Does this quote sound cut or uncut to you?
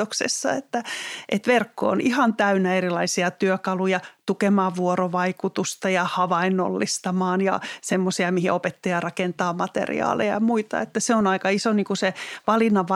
uncut